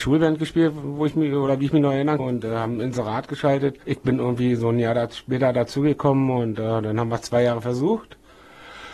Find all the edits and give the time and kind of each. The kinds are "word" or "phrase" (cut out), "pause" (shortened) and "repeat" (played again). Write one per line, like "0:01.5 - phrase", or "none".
0:02.2 - word
0:03.8 - pause